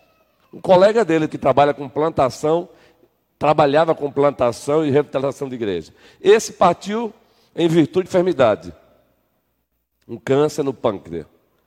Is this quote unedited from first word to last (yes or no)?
no